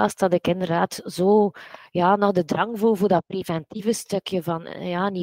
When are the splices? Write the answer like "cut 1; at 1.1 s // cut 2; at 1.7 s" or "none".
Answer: none